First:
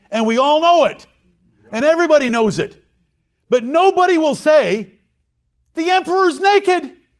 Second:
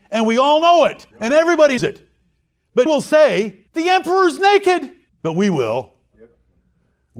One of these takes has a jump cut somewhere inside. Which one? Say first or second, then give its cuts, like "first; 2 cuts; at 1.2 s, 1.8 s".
second; 5 cuts; at 1.1 s, 1.8 s, 2.9 s, 3.7 s, 5.1 s